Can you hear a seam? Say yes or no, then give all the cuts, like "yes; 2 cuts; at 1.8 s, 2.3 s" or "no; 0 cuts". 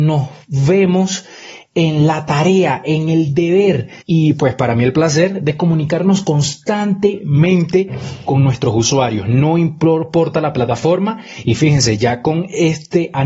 yes; 1 cut; at 4.0 s